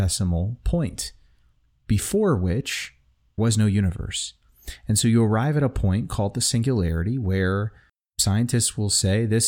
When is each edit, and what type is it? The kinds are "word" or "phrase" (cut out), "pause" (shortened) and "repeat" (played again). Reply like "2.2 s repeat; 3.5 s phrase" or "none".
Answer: 3.4 s word